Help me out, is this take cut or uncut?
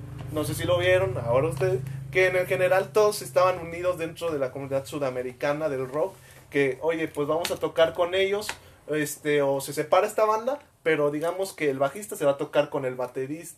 uncut